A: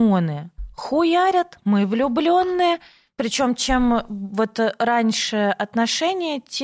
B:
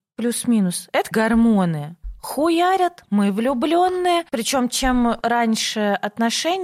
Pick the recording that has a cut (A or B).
B